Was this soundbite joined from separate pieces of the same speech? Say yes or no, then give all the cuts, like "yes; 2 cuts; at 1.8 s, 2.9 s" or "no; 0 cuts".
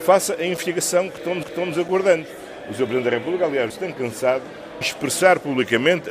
yes; 3 cuts; at 1.4 s, 3.7 s, 4.8 s